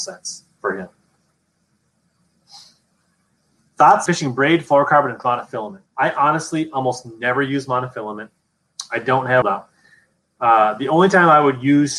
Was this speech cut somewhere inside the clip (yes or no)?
yes